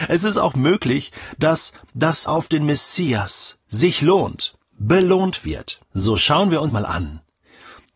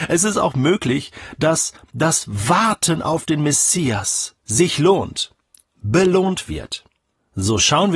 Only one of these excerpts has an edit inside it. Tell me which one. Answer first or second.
first